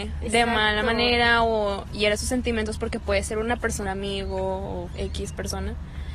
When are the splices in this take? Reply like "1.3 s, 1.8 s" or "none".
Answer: 3.9 s